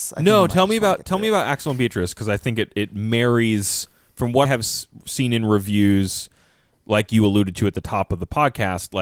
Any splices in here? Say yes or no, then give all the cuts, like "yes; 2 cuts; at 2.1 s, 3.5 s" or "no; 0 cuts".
yes; 1 cut; at 4.5 s